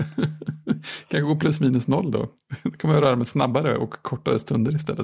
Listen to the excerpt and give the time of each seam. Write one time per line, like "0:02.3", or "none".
none